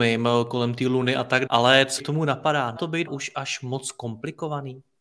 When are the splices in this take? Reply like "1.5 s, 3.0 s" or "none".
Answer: 1.5 s, 2.0 s, 2.8 s, 3.1 s